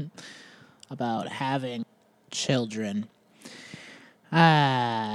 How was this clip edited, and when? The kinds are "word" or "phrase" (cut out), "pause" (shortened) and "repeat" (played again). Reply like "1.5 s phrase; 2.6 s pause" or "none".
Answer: none